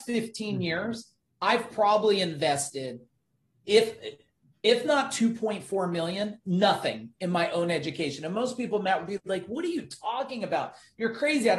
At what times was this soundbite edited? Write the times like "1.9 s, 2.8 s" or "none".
none